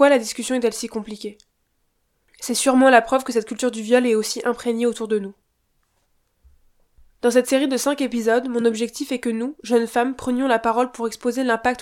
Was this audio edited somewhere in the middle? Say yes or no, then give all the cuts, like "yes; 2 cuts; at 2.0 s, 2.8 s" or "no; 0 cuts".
no; 0 cuts